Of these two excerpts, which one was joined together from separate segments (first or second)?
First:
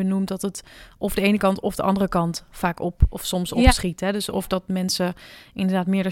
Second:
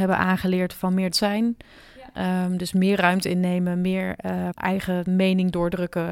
second